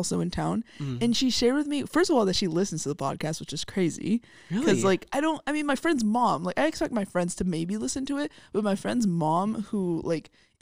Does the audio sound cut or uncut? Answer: uncut